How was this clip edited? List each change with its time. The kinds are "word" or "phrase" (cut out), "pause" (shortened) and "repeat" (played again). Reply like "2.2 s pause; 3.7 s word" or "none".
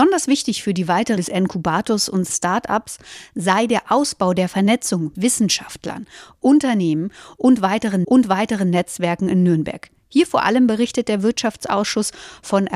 1.2 s word; 2.3 s word; 5.1 s word; 8.0 s repeat